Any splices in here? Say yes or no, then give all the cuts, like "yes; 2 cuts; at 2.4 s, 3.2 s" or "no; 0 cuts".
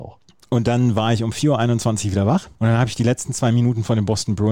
yes; 1 cut; at 2.6 s